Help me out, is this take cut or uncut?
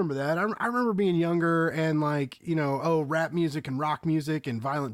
uncut